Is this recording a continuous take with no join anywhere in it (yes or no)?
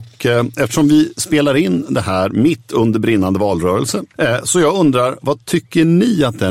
yes